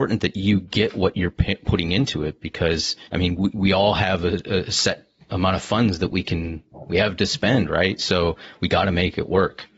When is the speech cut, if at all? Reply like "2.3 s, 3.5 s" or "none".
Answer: 3.1 s